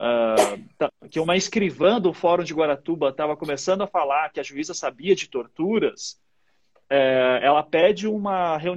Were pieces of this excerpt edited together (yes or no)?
no